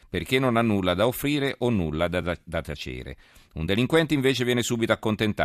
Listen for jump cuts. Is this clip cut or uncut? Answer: uncut